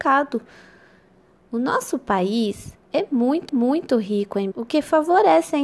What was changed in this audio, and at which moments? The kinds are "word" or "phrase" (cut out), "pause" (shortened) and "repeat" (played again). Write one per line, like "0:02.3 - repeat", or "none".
0:02.8 - pause
0:03.5 - repeat
0:04.5 - word